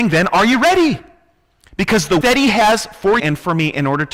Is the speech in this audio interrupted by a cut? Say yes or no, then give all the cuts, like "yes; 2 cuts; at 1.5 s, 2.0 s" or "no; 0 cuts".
yes; 2 cuts; at 2.2 s, 3.2 s